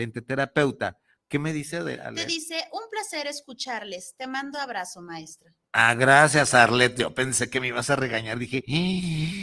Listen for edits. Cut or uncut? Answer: uncut